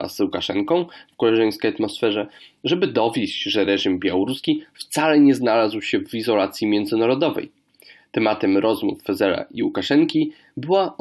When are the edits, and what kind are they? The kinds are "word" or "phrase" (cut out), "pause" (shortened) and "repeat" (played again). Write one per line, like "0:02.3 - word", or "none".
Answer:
none